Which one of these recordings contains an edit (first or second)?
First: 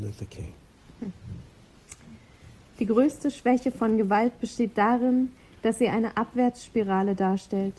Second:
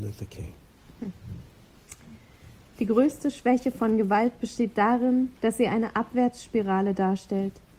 second